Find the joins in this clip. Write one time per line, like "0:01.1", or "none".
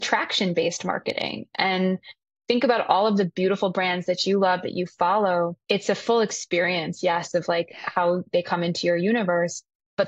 none